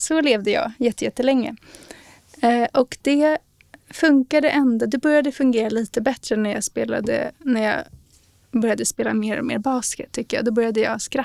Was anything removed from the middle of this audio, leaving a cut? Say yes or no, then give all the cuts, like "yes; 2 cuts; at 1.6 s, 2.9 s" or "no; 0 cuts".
no; 0 cuts